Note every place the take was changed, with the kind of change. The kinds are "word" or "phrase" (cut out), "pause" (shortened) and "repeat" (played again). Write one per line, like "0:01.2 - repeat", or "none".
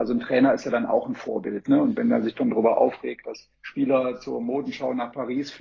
0:03.5 - pause